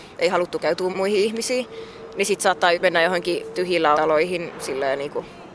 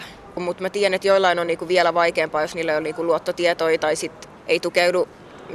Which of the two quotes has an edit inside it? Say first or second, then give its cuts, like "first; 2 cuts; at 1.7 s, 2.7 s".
first; 4 cuts; at 0.9 s, 2.7 s, 3.5 s, 3.9 s